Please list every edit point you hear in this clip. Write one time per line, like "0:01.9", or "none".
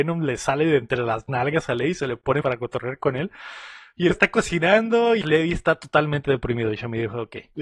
0:02.4
0:04.1
0:05.2